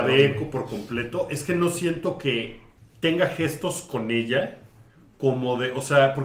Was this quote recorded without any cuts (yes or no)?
no